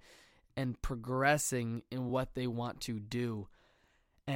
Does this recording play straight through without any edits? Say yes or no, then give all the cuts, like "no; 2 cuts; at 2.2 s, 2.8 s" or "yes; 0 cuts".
yes; 0 cuts